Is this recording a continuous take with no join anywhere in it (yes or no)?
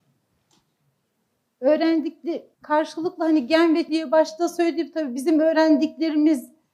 no